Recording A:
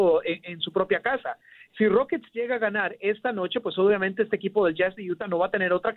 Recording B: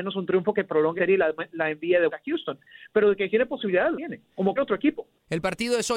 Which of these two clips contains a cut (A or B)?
B